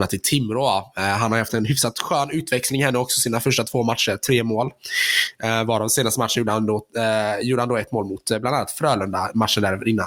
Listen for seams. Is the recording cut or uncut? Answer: uncut